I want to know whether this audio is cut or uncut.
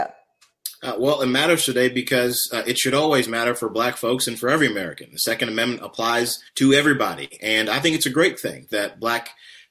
cut